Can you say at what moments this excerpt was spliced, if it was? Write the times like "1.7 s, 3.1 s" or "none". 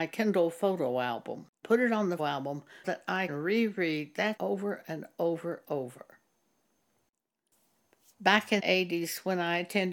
1.6 s, 2.2 s, 2.8 s, 3.3 s, 4.4 s, 5.6 s, 8.6 s